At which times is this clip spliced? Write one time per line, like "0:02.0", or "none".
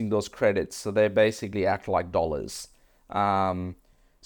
none